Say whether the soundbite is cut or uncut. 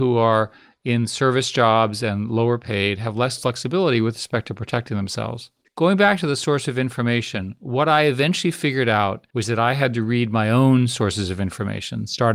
cut